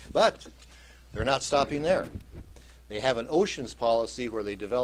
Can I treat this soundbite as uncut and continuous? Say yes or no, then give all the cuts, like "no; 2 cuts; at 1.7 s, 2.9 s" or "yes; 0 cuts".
yes; 0 cuts